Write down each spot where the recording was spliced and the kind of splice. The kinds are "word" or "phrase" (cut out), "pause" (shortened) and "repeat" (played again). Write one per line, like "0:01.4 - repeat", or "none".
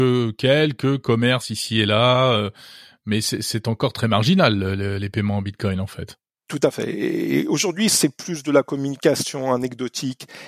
none

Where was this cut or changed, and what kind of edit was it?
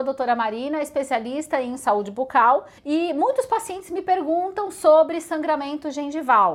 0:02.8 - pause

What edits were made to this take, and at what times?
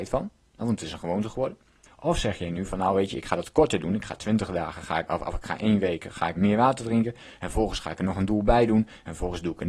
0:01.9 - pause
0:05.1 - word
0:06.4 - word

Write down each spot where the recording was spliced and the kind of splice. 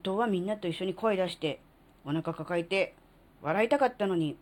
none

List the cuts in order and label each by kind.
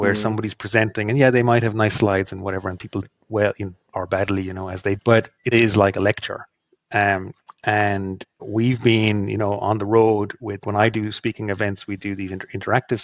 0:03.0 - word
0:03.9 - word
0:05.0 - word
0:05.5 - word
0:08.4 - word
0:10.6 - word

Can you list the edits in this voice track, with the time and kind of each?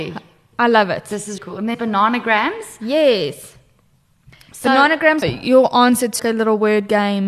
0:01.4 - word
0:01.7 - word
0:05.2 - word
0:06.2 - word

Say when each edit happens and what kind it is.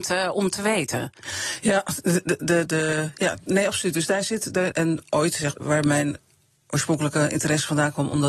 0:02.7 - word
0:04.7 - word
0:05.5 - word

